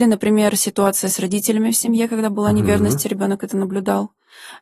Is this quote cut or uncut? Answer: uncut